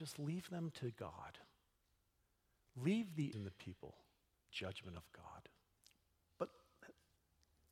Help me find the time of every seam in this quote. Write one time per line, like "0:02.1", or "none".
0:03.3
0:04.5
0:05.8